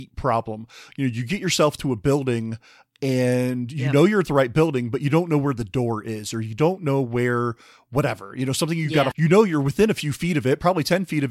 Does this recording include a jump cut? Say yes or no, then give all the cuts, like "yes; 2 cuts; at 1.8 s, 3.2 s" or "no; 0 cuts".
yes; 1 cut; at 9.1 s